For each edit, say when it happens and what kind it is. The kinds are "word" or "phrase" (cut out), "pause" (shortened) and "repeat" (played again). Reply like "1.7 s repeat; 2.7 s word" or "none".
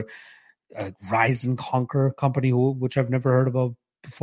none